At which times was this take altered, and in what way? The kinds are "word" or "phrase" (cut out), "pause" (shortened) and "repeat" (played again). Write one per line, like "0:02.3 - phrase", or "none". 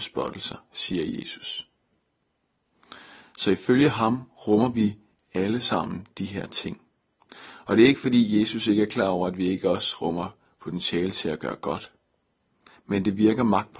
none

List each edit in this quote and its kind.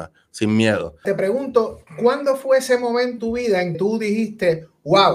0:01.9 - pause
0:03.2 - word
0:03.7 - word

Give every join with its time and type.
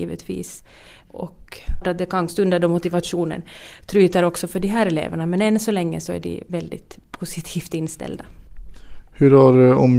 0:01.0 - word
0:01.8 - word
0:02.3 - word
0:07.0 - pause

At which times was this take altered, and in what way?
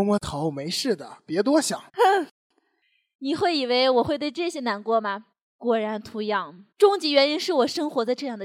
0:01.9 - pause
0:05.3 - pause
0:06.7 - pause

